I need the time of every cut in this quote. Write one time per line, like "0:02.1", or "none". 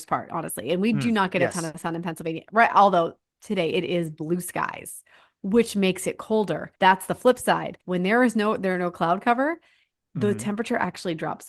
0:06.8
0:07.8